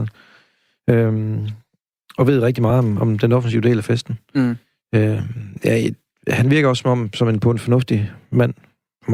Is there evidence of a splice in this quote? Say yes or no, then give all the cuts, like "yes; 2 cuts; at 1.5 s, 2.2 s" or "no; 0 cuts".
no; 0 cuts